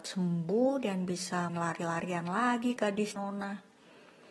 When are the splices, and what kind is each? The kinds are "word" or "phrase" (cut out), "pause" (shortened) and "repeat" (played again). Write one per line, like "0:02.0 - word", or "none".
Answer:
0:01.5 - word
0:02.8 - word
0:03.2 - word